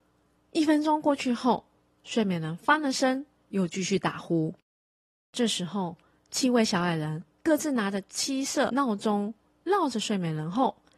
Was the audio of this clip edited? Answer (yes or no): no